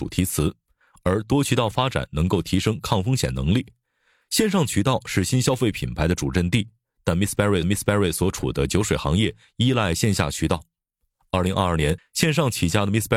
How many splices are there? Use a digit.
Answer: 1